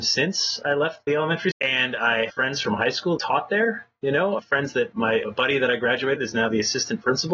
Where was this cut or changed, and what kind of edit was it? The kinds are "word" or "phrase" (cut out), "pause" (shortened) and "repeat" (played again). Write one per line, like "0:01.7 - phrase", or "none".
0:01.1 - word
0:01.5 - word
0:02.3 - word
0:03.2 - word
0:04.4 - word
0:04.9 - word
0:05.2 - word
0:06.2 - word